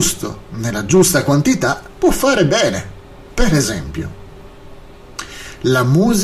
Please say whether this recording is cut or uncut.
cut